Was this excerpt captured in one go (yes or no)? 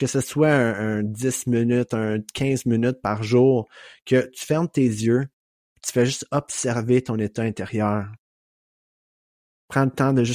yes